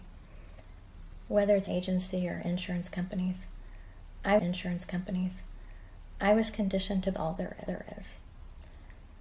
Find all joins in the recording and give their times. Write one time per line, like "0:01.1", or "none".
0:01.7
0:04.4
0:07.1
0:07.7